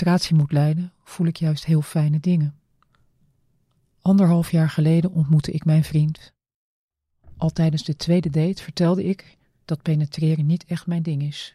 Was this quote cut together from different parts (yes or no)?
yes